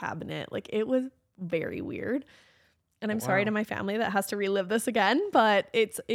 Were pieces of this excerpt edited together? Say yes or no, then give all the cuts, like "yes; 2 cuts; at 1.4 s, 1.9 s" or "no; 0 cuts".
no; 0 cuts